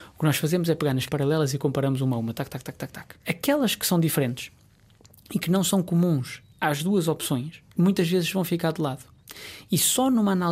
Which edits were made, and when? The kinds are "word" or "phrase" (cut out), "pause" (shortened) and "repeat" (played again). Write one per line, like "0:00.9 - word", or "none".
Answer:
0:01.1 - word
0:03.2 - pause
0:07.7 - pause